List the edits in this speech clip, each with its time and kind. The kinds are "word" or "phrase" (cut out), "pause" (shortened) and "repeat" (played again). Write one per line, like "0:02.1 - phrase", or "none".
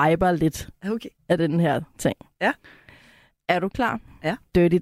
none